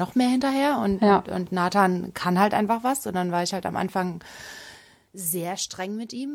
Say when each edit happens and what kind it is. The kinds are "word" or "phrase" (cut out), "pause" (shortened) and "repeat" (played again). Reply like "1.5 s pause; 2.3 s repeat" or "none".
none